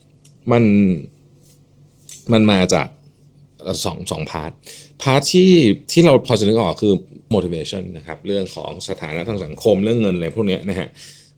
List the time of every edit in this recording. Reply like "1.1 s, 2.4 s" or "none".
5.8 s, 7.3 s